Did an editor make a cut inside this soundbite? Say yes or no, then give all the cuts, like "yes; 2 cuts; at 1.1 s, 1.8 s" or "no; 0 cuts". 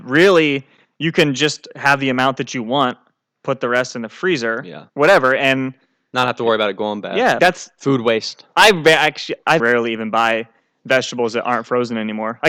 yes; 2 cuts; at 7.4 s, 9.6 s